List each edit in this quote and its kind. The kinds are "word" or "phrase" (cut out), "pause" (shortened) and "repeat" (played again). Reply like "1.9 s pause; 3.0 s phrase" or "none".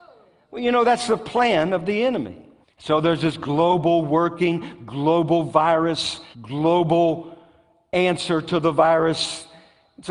2.6 s pause; 6.3 s pause

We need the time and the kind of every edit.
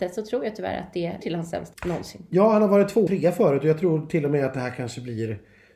1.2 s word; 1.7 s word; 3.1 s word

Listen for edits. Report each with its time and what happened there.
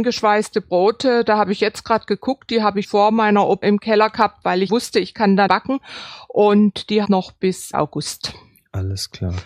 2.8 s word; 3.6 s word; 4.7 s word; 5.5 s word; 7.0 s phrase; 7.7 s word

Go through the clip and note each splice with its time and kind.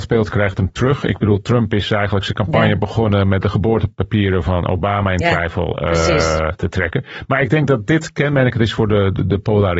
none

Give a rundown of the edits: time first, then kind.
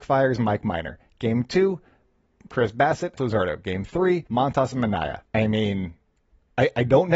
3.2 s word; 4.3 s pause; 5.2 s pause

